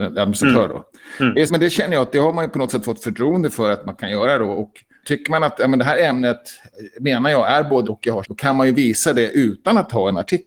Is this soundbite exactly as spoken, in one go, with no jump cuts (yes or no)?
no